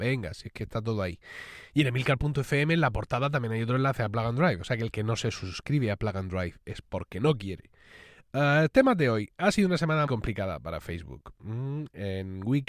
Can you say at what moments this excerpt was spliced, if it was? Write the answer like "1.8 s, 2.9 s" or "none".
10.1 s